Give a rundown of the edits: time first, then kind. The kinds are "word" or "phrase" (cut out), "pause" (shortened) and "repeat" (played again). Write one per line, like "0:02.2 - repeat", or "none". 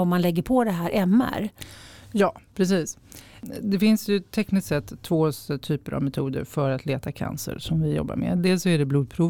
none